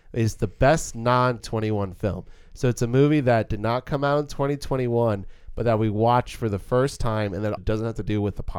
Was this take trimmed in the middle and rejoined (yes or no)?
yes